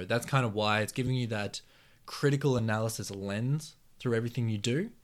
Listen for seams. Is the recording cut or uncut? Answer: uncut